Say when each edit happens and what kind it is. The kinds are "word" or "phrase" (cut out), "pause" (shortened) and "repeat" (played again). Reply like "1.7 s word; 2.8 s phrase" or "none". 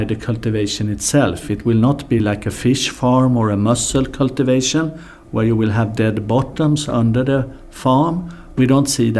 none